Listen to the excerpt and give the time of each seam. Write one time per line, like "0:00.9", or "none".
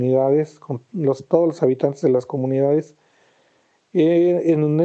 none